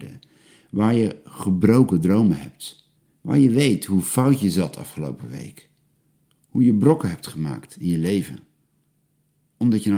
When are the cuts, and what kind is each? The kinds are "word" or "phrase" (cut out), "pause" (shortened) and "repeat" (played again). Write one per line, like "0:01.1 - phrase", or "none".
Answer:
0:03.0 - pause